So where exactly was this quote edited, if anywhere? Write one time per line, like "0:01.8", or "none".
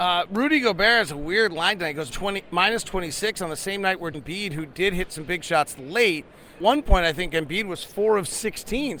0:02.1
0:04.1
0:06.6